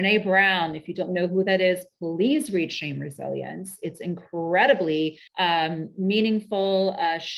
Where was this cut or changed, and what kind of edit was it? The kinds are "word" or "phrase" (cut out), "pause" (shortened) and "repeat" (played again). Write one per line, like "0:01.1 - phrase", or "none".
0:05.3 - pause